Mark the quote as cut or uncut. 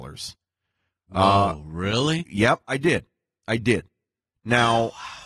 uncut